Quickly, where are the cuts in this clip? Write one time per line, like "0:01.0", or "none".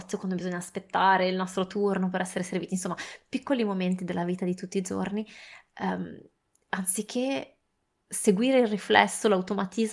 none